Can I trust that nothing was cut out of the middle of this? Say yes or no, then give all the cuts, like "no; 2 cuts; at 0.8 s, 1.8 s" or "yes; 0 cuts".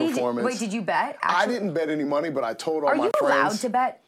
yes; 0 cuts